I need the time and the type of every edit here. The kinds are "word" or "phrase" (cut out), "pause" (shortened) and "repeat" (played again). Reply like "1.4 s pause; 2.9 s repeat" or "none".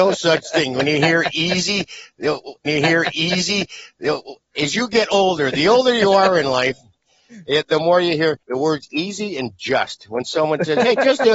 2.7 s repeat; 8.4 s pause